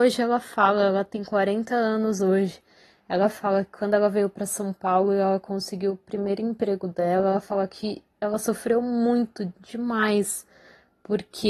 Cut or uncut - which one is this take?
uncut